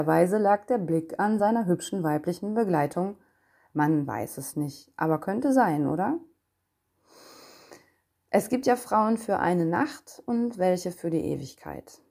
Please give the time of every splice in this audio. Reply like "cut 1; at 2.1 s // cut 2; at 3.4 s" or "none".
none